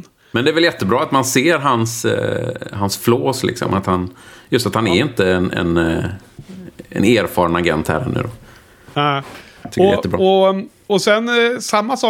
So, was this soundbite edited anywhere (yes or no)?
no